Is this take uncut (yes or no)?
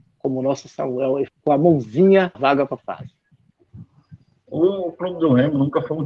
no